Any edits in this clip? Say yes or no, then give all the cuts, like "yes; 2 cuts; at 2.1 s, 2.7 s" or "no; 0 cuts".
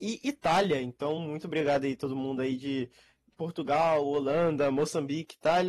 no; 0 cuts